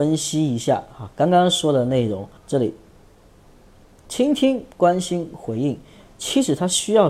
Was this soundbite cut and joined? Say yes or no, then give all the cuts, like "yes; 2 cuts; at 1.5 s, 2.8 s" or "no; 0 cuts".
yes; 2 cuts; at 2.4 s, 4.7 s